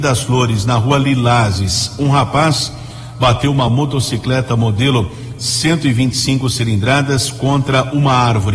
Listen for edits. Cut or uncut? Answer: uncut